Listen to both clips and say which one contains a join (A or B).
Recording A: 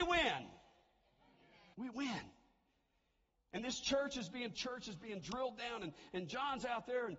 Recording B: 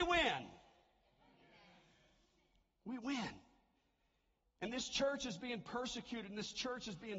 A